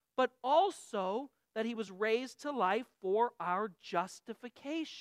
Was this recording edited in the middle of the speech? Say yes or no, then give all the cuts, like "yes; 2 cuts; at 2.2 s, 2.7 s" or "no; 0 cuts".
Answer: no; 0 cuts